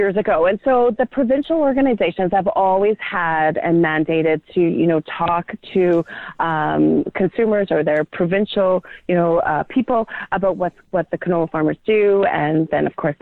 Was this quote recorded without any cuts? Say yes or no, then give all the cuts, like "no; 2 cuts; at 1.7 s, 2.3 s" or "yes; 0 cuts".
no; 1 cut; at 10.8 s